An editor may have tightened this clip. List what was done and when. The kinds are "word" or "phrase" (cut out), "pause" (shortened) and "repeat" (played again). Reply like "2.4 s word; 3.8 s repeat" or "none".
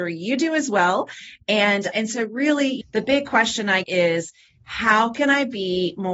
1.9 s word; 2.8 s word; 3.8 s word